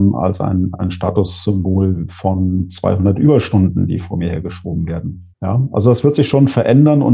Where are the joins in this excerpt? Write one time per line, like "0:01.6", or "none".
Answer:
0:05.3